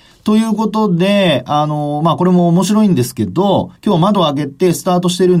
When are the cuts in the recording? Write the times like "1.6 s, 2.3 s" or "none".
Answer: 3.8 s